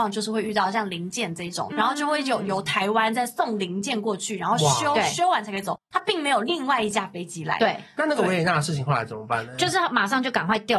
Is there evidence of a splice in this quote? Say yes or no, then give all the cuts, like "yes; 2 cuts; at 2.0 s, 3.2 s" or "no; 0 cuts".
yes; 1 cut; at 1.7 s